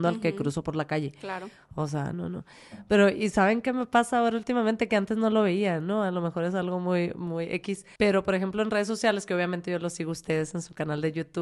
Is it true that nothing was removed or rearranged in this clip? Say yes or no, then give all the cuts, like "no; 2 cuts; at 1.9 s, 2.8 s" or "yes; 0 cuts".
no; 2 cuts; at 2.1 s, 8.0 s